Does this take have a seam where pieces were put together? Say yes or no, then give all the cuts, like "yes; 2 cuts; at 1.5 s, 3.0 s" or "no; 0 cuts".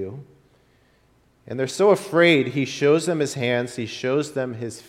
no; 0 cuts